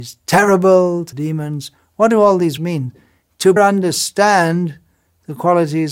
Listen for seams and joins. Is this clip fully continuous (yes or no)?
no